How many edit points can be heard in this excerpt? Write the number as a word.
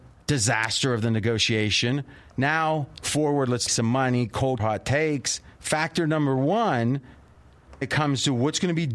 five